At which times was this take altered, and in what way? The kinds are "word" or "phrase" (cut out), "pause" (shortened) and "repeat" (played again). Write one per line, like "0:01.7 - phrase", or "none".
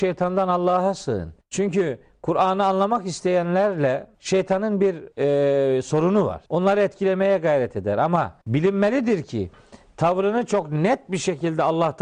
0:01.4 - pause
0:04.1 - pause
0:05.1 - pause
0:06.5 - pause
0:08.4 - pause

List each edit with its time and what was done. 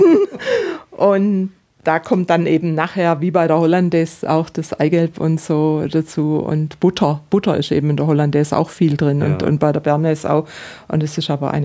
none

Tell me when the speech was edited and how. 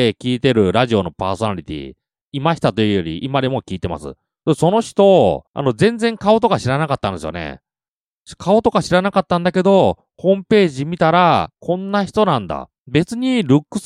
0:05.5 - pause
0:11.5 - word
0:12.8 - pause

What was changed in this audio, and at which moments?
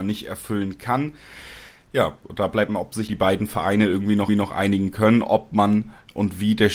0:02.7 - word
0:03.1 - word
0:04.3 - repeat

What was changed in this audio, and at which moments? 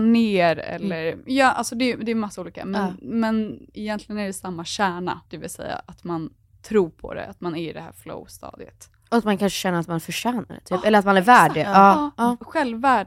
0:05.3 - pause

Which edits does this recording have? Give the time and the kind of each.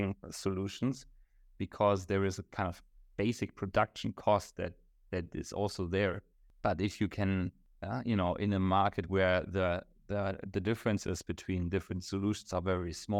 none

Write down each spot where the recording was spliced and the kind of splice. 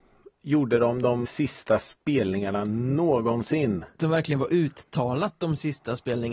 0:01.2 - word

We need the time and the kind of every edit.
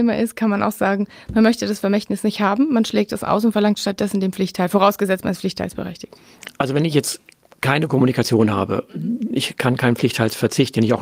none

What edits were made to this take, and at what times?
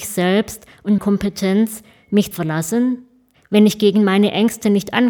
0:01.0 - word
0:02.3 - phrase

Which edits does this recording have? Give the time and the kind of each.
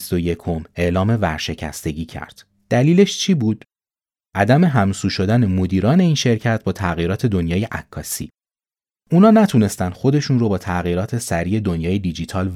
none

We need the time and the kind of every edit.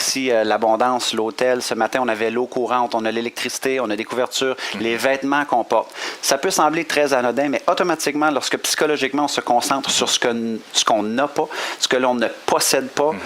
none

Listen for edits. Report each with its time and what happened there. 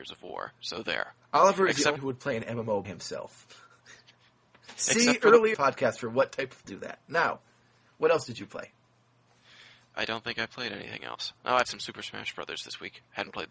0:02.0 - phrase
0:02.8 - word
0:05.5 - phrase
0:06.6 - word
0:11.6 - word

